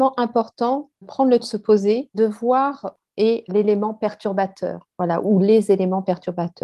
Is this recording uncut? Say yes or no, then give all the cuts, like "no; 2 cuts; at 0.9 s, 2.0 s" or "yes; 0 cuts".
no; 6 cuts; at 1.0 s, 1.4 s, 2.1 s, 3.0 s, 3.5 s, 5.2 s